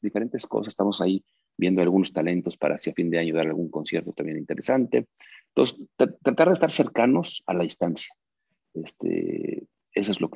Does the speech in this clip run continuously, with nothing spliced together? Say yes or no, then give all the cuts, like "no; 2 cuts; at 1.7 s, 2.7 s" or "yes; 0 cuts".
yes; 0 cuts